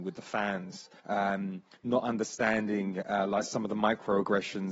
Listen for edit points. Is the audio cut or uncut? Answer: cut